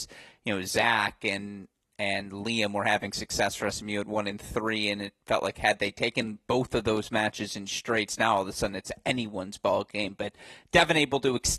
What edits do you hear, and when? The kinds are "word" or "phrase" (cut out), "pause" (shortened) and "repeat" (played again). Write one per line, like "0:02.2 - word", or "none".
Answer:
none